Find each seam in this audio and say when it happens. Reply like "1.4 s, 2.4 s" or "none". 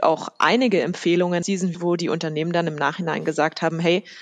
1.4 s, 1.7 s